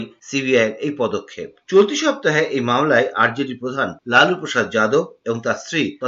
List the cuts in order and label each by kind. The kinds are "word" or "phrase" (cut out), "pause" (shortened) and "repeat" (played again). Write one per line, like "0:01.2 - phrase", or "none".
none